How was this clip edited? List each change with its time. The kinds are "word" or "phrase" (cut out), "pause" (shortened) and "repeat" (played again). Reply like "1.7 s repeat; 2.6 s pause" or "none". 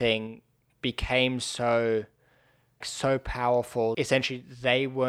2.8 s word; 3.9 s word